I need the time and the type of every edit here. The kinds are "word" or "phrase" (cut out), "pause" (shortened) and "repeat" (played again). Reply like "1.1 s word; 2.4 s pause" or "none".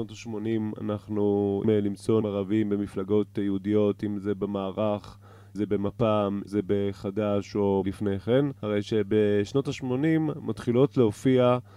1.6 s word; 2.2 s word; 5.5 s word; 6.5 s word; 7.8 s word; 8.6 s pause